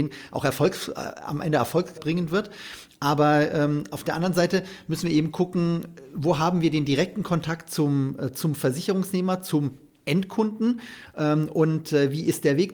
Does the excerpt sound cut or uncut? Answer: cut